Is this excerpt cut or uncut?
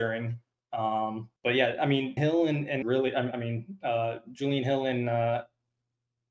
cut